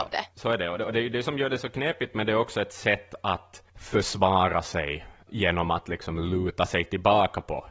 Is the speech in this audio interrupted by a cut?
yes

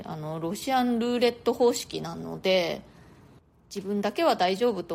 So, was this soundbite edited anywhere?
no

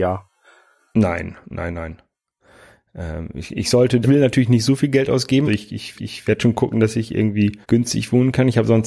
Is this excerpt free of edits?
no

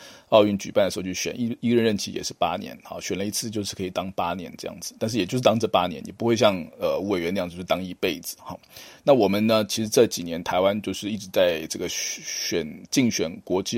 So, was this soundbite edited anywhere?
no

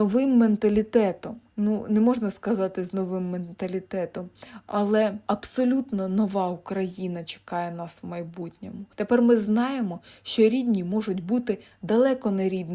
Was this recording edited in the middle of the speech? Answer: no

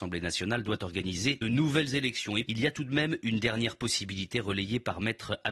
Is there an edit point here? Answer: yes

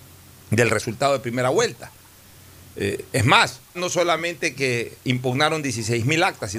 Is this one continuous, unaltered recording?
no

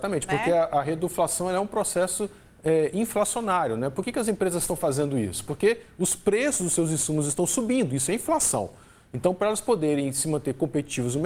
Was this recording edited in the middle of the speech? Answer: no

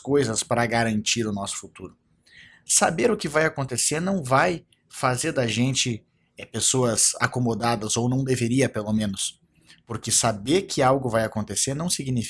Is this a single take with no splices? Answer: yes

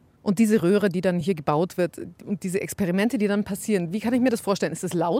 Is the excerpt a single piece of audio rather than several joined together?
yes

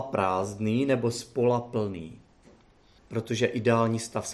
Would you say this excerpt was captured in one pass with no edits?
no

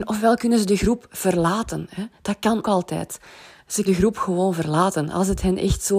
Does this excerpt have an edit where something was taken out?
yes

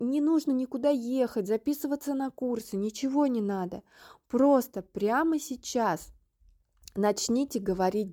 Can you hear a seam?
no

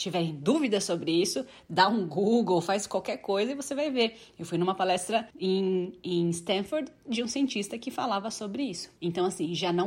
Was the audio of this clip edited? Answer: yes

